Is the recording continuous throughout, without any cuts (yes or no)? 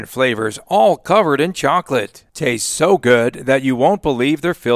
yes